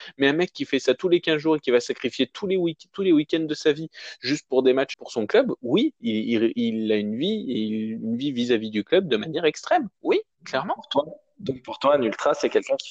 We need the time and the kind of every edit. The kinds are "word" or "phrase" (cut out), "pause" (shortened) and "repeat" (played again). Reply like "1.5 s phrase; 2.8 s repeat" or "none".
4.9 s word